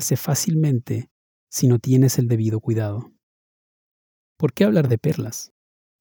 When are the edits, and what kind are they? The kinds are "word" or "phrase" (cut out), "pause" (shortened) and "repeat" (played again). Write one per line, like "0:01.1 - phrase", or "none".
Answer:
none